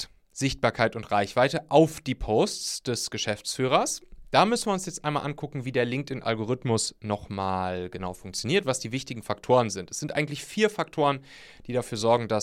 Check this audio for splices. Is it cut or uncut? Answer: uncut